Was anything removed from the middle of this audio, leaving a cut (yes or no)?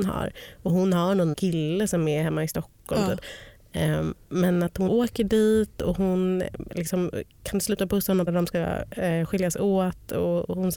yes